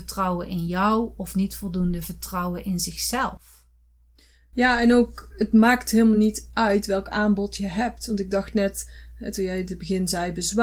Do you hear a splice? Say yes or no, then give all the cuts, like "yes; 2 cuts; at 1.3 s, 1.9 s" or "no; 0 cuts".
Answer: no; 0 cuts